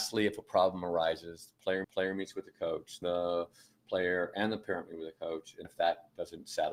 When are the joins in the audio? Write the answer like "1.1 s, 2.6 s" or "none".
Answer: 1.8 s, 3.0 s, 5.6 s